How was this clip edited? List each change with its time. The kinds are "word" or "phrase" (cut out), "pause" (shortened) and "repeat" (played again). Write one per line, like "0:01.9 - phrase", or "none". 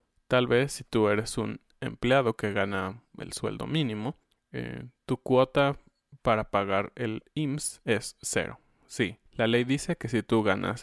0:04.2 - pause
0:09.3 - pause